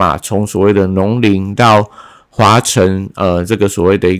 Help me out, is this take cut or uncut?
uncut